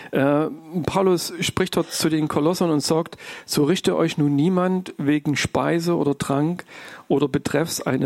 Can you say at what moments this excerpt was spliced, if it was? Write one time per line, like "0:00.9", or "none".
none